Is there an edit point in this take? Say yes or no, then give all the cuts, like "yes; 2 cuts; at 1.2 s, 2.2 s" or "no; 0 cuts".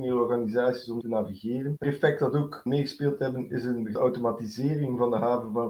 yes; 4 cuts; at 1.0 s, 1.8 s, 2.7 s, 4.0 s